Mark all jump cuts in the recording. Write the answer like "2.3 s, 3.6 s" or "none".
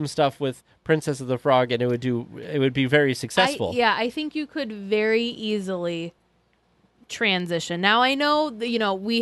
none